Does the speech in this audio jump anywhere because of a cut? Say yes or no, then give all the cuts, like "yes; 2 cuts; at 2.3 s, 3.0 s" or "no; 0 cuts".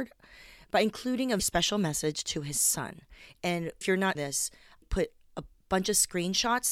yes; 4 cuts; at 1.4 s, 3.8 s, 4.1 s, 4.8 s